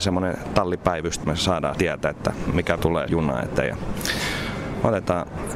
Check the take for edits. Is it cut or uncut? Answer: cut